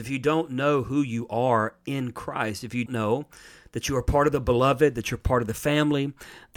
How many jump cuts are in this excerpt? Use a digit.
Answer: 1